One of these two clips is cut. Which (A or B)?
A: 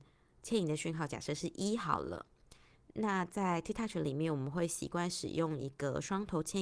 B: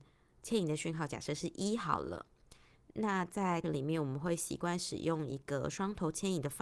B